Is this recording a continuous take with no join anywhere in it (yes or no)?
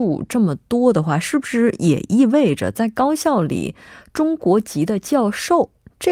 yes